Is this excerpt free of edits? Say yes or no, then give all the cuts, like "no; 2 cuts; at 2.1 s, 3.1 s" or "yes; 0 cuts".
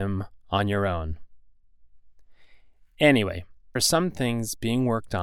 no; 1 cut; at 3.8 s